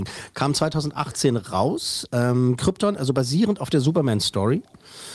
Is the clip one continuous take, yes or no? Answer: yes